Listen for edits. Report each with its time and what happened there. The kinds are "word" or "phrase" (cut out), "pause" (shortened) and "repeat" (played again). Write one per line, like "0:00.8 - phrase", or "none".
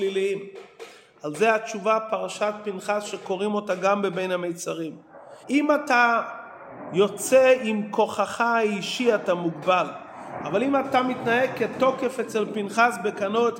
0:05.4 - pause